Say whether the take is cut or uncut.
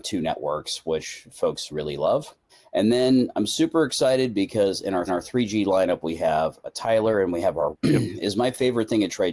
cut